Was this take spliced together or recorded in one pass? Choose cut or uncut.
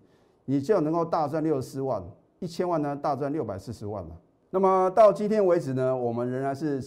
uncut